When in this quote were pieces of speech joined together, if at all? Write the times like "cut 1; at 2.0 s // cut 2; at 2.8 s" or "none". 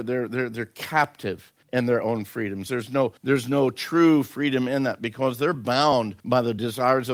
cut 1; at 1.6 s // cut 2; at 3.2 s // cut 3; at 6.2 s